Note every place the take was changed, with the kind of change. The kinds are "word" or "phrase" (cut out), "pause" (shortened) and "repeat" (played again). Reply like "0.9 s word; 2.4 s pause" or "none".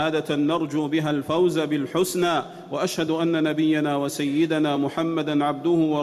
none